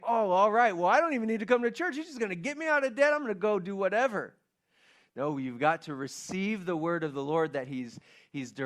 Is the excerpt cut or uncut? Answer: uncut